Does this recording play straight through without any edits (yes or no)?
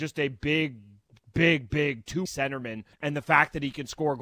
no